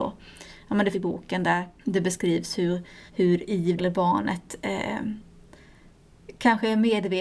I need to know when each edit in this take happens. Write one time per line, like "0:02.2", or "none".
0:00.9
0:01.8
0:03.1
0:03.8